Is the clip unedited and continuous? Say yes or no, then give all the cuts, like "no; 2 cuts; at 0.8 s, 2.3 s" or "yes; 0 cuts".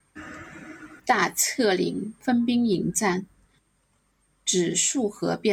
no; 1 cut; at 1.0 s